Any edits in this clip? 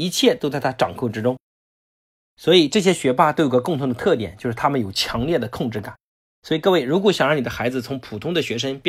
no; 0 cuts

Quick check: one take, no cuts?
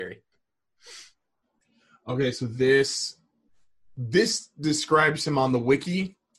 yes; 0 cuts

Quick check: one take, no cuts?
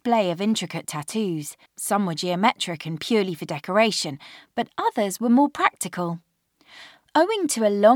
no; 1 cut; at 1.7 s

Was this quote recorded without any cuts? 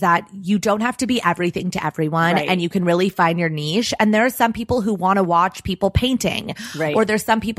yes; 0 cuts

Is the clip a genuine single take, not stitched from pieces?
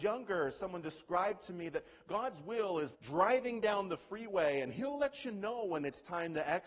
no; 1 cut; at 2.9 s

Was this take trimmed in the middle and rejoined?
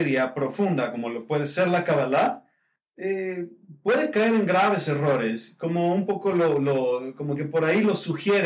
no; 0 cuts

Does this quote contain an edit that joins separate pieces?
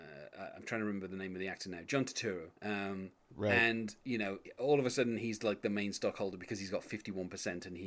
yes; 1 cut; at 2.6 s

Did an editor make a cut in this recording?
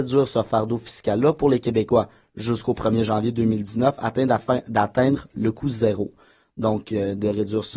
no; 0 cuts

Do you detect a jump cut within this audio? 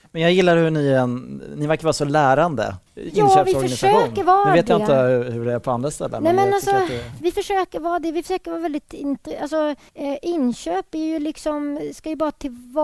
yes; 2 cuts; at 2.9 s, 9.9 s

